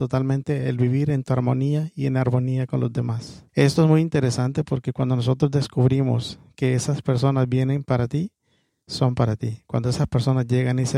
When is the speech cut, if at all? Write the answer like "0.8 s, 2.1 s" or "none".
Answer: 3.5 s

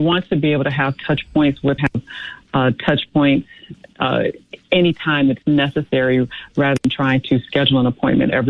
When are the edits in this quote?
1.8 s

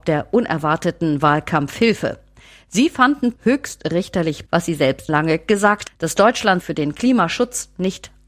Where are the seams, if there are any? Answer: 3.4 s, 4.5 s, 5.1 s, 5.9 s, 6.6 s

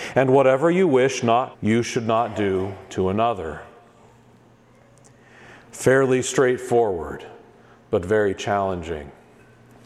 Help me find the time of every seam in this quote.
1.5 s

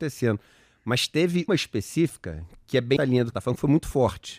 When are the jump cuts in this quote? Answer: 1.5 s, 3.0 s, 3.3 s

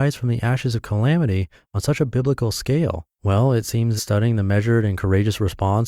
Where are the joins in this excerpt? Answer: 3.1 s, 4.0 s

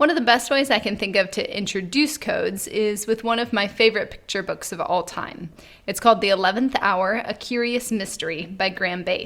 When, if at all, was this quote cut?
none

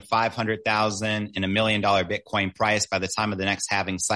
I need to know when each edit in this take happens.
none

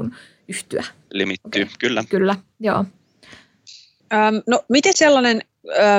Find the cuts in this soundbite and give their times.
4.9 s

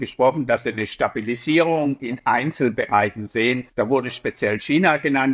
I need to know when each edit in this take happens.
3.7 s

